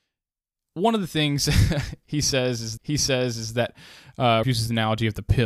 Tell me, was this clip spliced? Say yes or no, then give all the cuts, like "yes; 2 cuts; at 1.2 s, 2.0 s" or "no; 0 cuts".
yes; 2 cuts; at 2.8 s, 4.4 s